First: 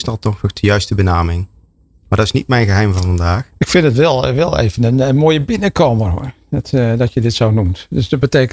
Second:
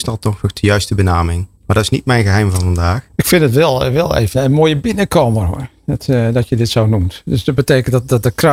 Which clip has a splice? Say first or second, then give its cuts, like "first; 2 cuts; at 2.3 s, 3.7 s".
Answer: second; 2 cuts; at 1.5 s, 4.3 s